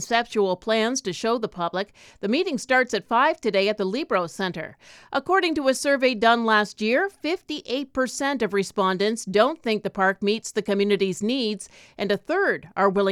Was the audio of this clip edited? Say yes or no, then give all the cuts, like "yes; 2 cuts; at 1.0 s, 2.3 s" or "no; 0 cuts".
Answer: no; 0 cuts